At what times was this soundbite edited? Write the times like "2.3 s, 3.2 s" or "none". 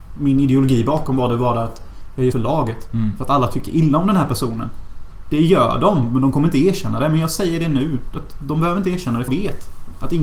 2.3 s, 9.3 s